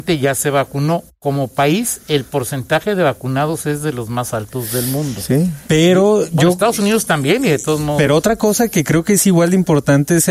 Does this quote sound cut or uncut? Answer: uncut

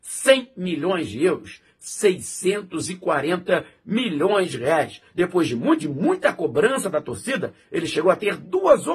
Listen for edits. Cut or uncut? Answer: cut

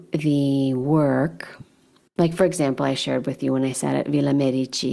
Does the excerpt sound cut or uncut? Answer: uncut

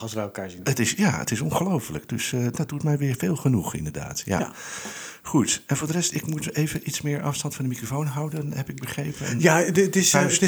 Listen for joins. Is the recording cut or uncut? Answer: uncut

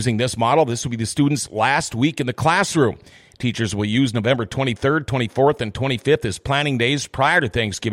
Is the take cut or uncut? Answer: uncut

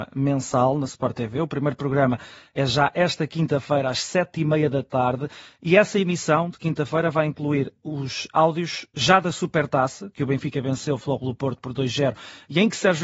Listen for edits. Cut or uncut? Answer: uncut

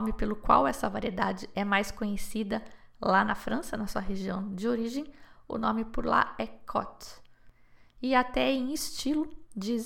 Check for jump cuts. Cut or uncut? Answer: uncut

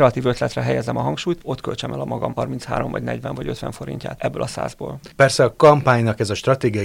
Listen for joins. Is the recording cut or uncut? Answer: uncut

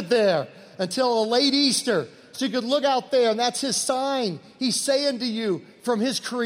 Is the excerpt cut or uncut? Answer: uncut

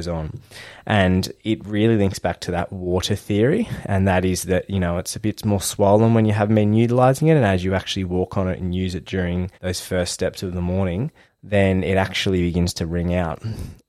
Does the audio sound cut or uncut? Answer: cut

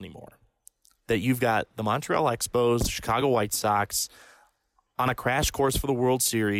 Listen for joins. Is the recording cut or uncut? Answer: uncut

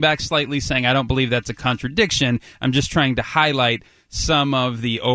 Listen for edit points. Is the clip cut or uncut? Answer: uncut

